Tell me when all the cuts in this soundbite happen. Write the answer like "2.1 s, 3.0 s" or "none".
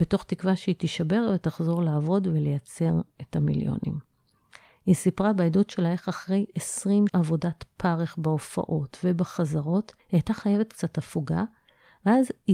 7.1 s, 10.0 s

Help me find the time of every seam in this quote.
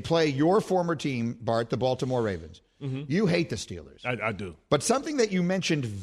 none

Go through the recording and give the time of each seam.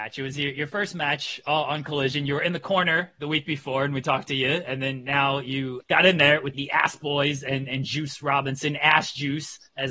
5.8 s, 6.5 s

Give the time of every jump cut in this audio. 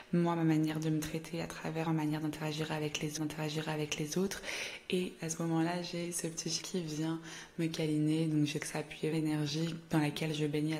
1.9 s, 3.2 s, 6.6 s, 8.6 s, 9.1 s

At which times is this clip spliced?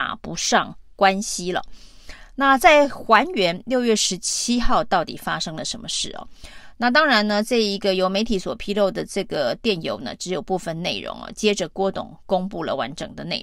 none

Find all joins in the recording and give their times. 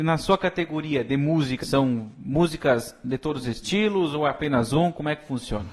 1.6 s

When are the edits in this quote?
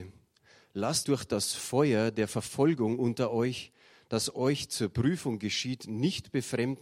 1.0 s

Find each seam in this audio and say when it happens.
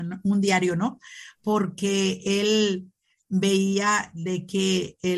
none

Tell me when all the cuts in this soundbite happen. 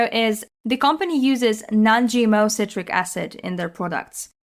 none

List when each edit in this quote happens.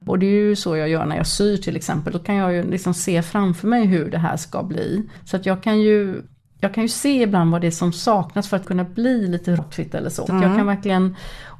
2.1 s, 8.6 s, 9.6 s, 10.3 s

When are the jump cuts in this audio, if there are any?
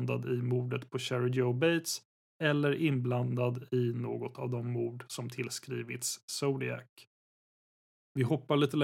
none

